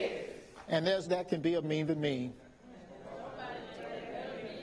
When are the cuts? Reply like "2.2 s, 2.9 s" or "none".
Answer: 1.0 s, 1.6 s